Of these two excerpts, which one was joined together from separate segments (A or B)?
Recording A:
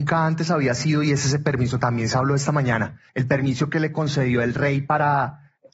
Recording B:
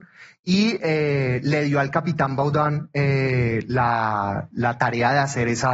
A